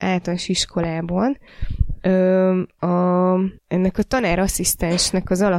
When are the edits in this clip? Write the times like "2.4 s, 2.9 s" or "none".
3.6 s